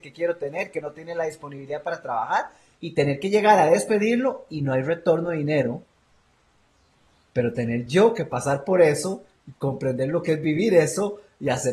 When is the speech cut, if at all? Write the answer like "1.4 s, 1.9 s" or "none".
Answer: none